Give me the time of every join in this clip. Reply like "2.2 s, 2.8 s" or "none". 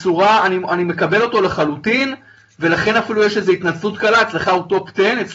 none